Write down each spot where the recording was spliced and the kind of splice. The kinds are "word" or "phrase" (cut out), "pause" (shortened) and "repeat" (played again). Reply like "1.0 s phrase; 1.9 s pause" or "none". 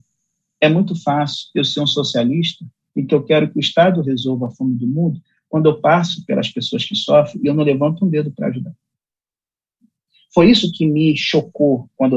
none